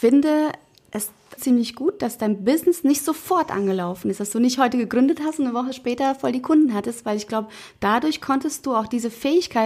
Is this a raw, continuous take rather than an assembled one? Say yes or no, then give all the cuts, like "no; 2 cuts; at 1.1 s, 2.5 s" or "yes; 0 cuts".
no; 1 cut; at 1.4 s